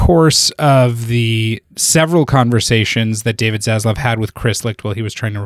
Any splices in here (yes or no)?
yes